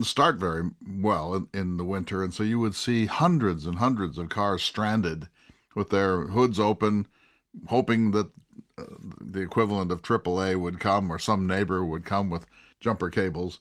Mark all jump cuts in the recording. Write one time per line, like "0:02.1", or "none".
none